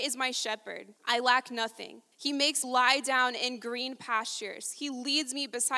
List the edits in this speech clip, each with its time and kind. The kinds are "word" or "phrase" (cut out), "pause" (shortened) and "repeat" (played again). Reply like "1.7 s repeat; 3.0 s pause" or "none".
1.0 s pause; 2.1 s pause; 2.6 s word